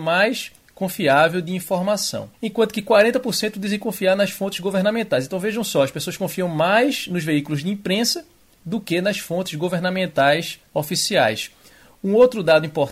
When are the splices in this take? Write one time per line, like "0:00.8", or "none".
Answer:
0:02.3
0:10.7